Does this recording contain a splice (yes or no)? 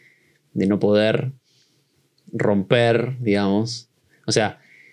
no